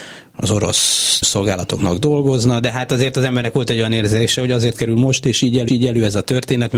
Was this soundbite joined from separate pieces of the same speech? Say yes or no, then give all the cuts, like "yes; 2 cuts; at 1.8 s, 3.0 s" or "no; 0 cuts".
yes; 2 cuts; at 1.2 s, 5.7 s